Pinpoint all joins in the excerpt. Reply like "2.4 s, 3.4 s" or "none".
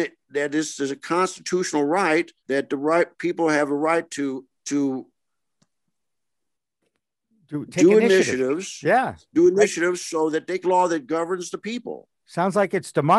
2.4 s, 4.5 s, 10.6 s